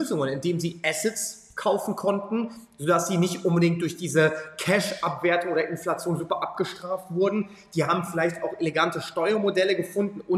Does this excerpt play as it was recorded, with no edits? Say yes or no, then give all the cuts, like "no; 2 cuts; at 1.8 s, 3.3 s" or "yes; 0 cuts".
yes; 0 cuts